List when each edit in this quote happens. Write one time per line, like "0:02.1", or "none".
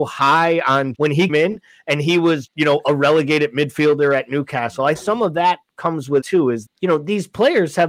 0:00.9
0:01.3
0:02.5
0:05.0
0:06.2
0:06.7